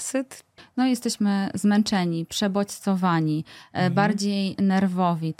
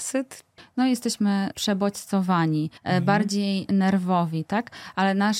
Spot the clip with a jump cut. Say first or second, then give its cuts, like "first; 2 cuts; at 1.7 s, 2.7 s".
second; 2 cuts; at 1.5 s, 2.8 s